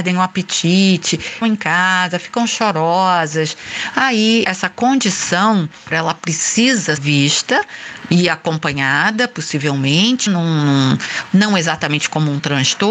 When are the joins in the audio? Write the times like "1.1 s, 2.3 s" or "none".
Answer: 1.4 s, 4.4 s, 5.9 s, 7.0 s, 10.3 s